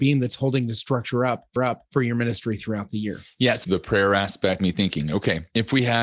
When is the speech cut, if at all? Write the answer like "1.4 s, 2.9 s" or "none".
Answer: 1.6 s, 3.6 s, 4.6 s